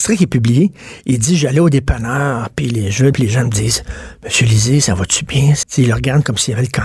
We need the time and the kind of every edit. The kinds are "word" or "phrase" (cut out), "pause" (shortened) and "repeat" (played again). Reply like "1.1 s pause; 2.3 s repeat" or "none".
3.1 s word; 5.6 s word